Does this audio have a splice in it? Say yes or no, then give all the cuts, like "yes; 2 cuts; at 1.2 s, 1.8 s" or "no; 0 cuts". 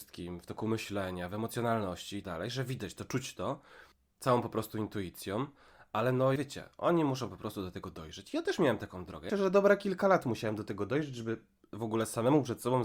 yes; 3 cuts; at 2.2 s, 6.4 s, 9.3 s